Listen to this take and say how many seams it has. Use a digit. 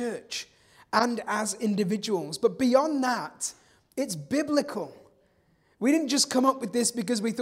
0